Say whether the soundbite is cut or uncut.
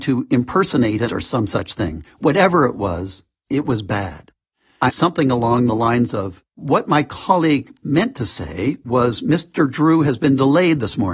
cut